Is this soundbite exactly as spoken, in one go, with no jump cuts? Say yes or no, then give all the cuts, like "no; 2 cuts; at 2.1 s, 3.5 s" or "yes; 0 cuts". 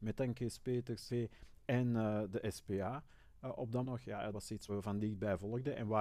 no; 4 cuts; at 1.1 s, 3.8 s, 4.3 s, 4.7 s